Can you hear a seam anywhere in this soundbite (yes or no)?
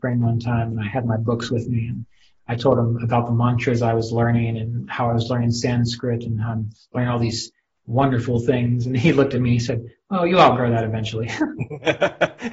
no